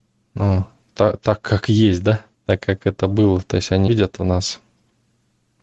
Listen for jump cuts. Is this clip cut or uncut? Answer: cut